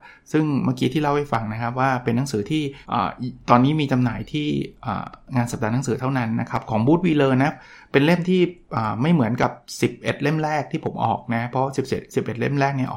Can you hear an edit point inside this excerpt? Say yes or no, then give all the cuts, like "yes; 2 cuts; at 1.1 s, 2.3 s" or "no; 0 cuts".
yes; 1 cut; at 2.8 s